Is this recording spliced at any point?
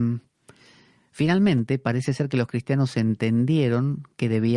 no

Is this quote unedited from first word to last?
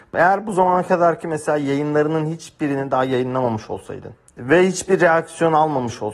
yes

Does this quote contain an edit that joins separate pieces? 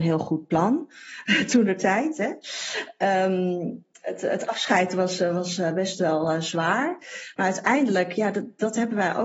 no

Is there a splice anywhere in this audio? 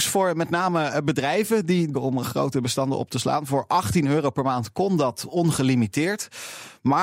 yes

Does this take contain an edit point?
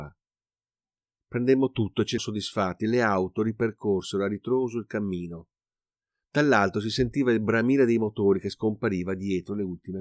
yes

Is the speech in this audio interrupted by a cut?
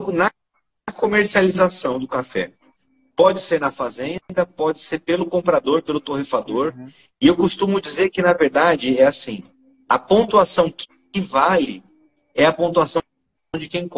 no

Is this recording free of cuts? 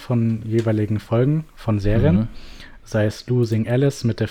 yes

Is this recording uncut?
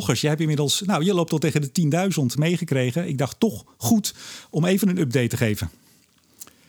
no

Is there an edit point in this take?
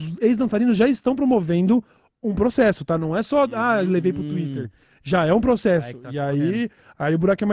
no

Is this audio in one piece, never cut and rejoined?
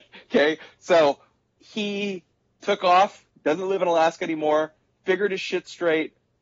yes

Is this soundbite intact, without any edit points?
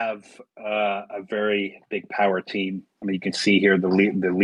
yes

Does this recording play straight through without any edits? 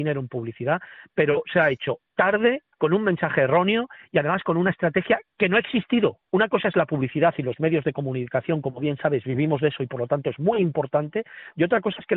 no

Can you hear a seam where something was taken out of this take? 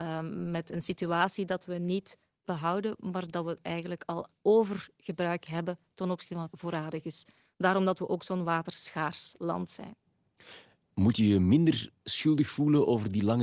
yes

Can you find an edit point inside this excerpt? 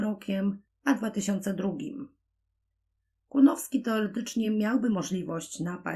no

